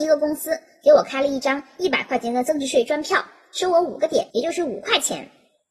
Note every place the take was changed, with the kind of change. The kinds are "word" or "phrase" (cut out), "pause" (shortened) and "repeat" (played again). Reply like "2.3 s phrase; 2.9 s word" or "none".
4.3 s pause